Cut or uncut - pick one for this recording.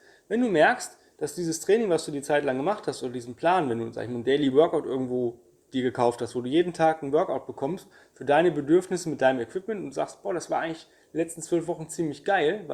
uncut